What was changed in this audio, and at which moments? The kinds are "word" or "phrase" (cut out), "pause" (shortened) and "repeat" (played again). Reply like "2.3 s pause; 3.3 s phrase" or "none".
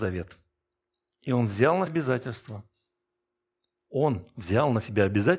1.9 s word